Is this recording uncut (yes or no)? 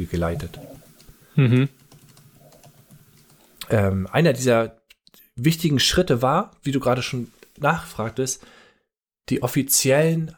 yes